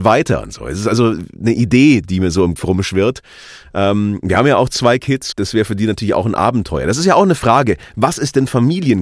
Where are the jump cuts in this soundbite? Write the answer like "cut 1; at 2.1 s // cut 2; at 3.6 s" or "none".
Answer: cut 1; at 2.0 s // cut 2; at 2.6 s // cut 3; at 5.3 s